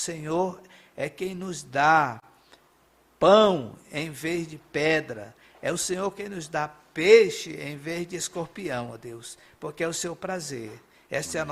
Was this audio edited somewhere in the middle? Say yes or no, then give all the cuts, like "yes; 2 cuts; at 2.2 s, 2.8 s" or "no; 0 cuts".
no; 0 cuts